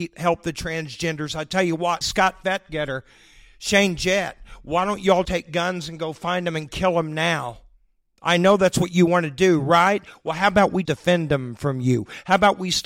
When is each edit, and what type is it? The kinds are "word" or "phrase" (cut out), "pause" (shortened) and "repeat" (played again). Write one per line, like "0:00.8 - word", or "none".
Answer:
0:02.0 - word
0:05.2 - word
0:10.8 - word

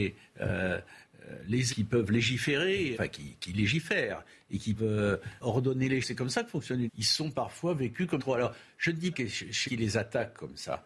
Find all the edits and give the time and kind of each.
0:01.7 - word
0:02.9 - word
0:04.8 - word
0:05.4 - word
0:06.0 - word
0:06.9 - word
0:08.2 - word
0:09.1 - word
0:09.6 - word

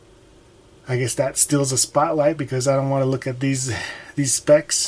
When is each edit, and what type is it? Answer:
none

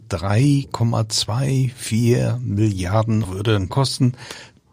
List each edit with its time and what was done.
0:03.2 - word
0:03.7 - word

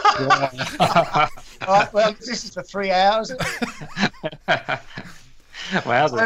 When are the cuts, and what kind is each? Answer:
0:02.2 - word
0:02.5 - word
0:03.3 - word

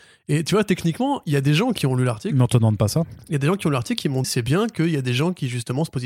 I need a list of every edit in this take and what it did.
0:04.2 - word

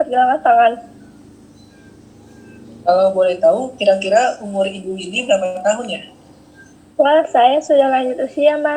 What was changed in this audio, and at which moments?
none

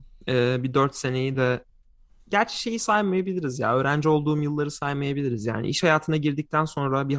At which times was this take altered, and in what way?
none

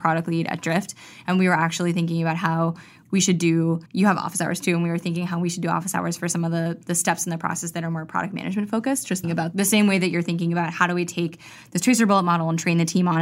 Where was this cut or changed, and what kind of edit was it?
0:03.9 - pause
0:09.2 - word

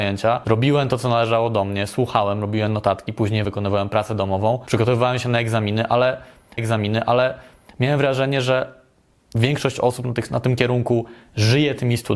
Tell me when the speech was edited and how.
0:03.4 - word
0:06.6 - repeat

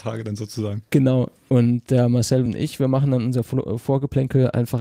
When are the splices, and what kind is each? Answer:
none

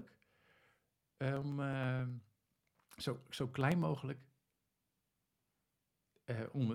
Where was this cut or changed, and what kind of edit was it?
none

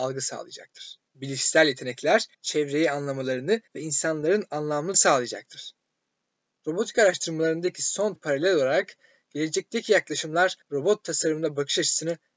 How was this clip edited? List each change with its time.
0:01.1 - pause
0:02.3 - pause
0:03.7 - pause
0:04.9 - word
0:08.2 - word
0:10.6 - pause

